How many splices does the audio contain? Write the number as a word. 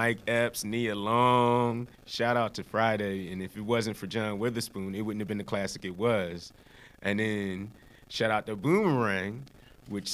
one